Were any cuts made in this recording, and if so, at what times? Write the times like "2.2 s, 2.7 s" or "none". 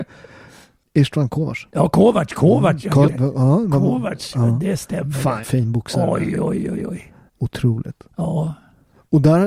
3.1 s, 5.4 s, 6.3 s, 7.3 s